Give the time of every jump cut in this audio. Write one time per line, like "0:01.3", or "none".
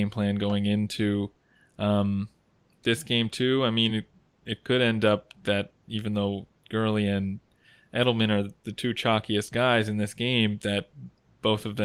none